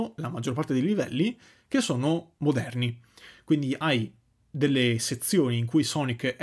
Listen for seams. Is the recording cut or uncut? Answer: uncut